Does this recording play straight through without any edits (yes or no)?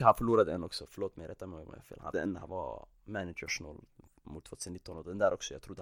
no